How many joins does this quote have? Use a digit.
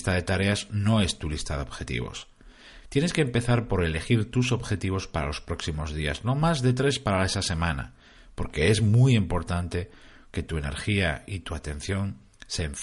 0